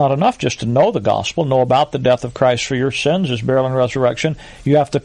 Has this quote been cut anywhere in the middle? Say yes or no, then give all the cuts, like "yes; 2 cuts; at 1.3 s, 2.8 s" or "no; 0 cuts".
no; 0 cuts